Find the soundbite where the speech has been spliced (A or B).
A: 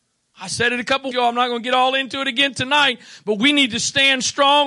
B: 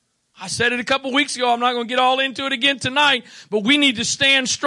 A